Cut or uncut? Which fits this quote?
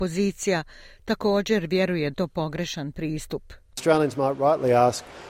cut